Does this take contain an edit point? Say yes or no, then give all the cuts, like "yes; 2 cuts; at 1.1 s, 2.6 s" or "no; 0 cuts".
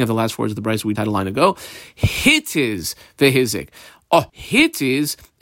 yes; 2 cuts; at 1.0 s, 4.3 s